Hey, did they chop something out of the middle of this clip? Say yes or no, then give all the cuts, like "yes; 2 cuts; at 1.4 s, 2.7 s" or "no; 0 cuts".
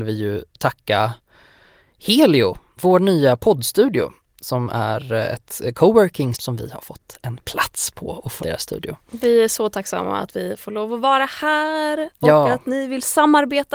yes; 2 cuts; at 6.3 s, 8.4 s